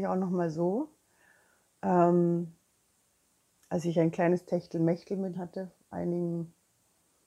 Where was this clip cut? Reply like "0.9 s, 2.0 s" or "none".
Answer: 5.3 s, 5.9 s